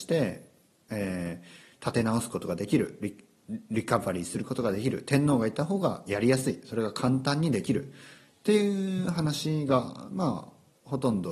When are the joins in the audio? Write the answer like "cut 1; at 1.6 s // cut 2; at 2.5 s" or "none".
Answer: none